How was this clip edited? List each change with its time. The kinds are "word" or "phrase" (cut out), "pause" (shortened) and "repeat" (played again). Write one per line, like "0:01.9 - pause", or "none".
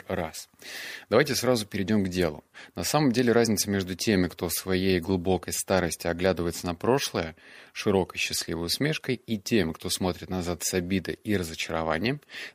none

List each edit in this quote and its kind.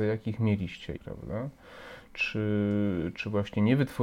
0:01.0 - word

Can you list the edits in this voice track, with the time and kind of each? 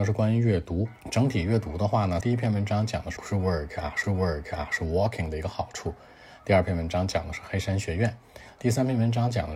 0:01.0 - pause
0:02.2 - phrase
0:03.2 - phrase
0:04.0 - repeat

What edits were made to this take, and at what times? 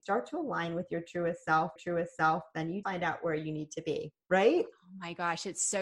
0:01.8 - repeat
0:02.8 - word
0:04.2 - pause

